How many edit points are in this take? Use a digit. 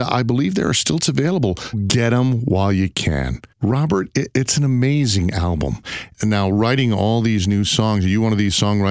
3